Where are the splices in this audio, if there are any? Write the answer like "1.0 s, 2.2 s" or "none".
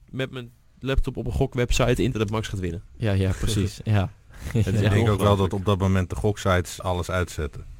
2.1 s, 6.8 s